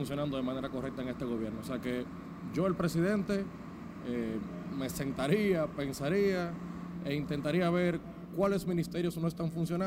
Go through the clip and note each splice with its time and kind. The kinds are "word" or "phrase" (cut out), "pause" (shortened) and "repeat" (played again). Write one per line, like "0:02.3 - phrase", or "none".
none

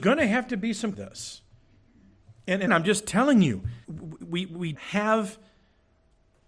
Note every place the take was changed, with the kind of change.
0:00.9 - phrase
0:02.7 - word
0:03.8 - pause
0:04.7 - word

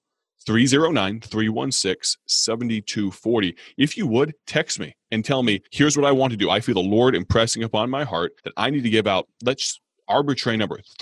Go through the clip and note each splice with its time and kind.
0:04.4 - pause
0:05.7 - pause
0:08.4 - pause

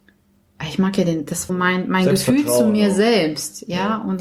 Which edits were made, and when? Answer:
0:01.5 - phrase

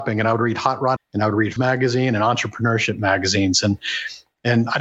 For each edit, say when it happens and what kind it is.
0:01.0 - word
0:01.6 - word

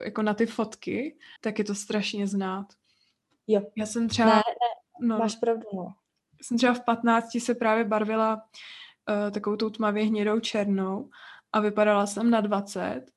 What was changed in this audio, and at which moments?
0:01.4 - pause

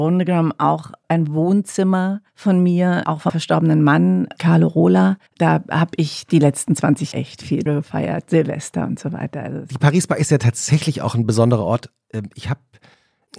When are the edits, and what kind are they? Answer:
0:02.3 - pause
0:03.3 - word
0:05.3 - pause
0:07.1 - word
0:07.7 - phrase

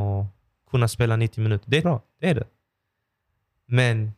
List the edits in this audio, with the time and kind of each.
0:01.8 - word

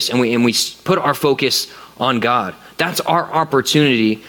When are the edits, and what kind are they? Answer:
none

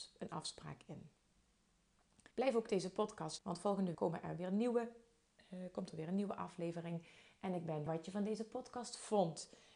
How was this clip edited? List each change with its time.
0:02.3 - pause
0:03.4 - word
0:03.9 - word
0:07.9 - phrase

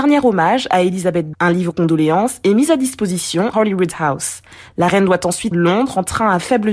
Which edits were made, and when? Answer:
0:01.3 - word
0:01.7 - word
0:03.5 - word
0:05.5 - word

